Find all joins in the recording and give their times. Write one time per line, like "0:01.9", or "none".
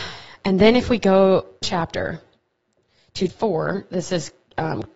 0:01.6
0:03.3